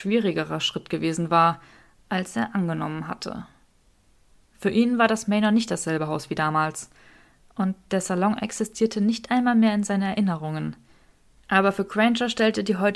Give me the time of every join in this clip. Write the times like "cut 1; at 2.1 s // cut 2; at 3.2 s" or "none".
none